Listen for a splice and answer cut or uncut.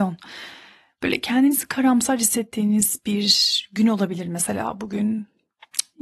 uncut